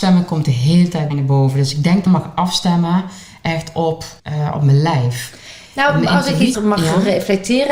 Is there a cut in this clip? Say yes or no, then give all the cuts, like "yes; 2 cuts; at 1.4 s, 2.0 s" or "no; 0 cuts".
yes; 4 cuts; at 1.1 s, 2.1 s, 4.2 s, 6.5 s